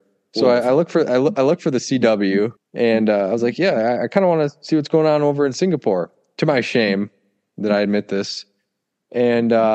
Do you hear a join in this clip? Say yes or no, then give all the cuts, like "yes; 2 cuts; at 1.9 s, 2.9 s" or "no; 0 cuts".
yes; 1 cut; at 2.6 s